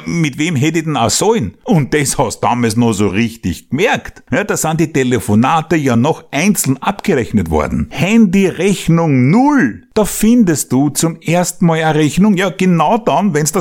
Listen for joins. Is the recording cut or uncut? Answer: uncut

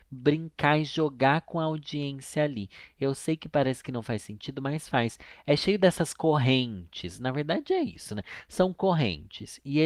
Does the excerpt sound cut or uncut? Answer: uncut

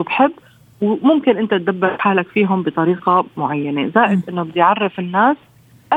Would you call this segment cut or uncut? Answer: uncut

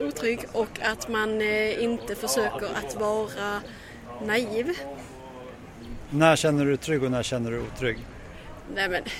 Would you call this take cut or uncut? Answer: uncut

